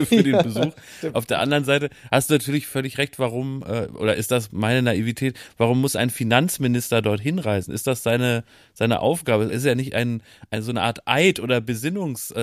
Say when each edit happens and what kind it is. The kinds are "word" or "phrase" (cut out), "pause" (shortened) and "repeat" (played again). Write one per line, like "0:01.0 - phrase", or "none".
none